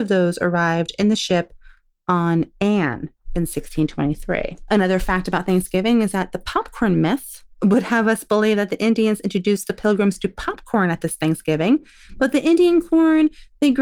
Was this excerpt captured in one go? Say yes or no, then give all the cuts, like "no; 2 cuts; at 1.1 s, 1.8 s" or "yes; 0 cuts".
yes; 0 cuts